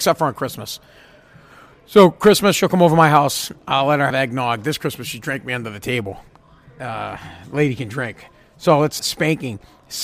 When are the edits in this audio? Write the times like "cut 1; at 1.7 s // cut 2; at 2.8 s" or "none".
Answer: cut 1; at 4.1 s // cut 2; at 9.0 s